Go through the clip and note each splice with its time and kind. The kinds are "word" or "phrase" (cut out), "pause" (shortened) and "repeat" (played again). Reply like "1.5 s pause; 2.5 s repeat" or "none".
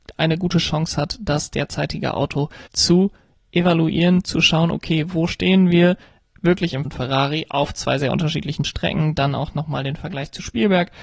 2.7 s pause; 6.8 s phrase